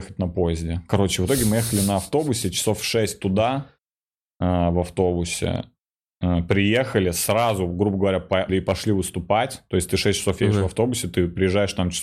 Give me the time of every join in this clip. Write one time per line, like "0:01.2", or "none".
0:08.5